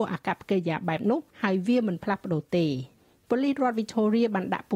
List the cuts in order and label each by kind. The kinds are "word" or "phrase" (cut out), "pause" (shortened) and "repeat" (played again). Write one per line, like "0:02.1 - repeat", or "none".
0:01.3 - pause
0:03.0 - pause